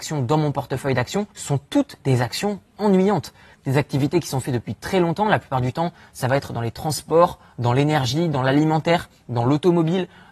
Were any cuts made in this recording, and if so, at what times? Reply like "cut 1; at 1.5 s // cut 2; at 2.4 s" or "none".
cut 1; at 1.3 s // cut 2; at 2.7 s